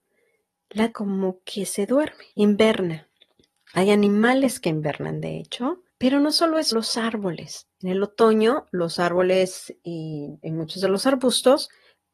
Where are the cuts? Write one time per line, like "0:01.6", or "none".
0:00.9
0:02.3
0:05.9
0:06.7
0:07.7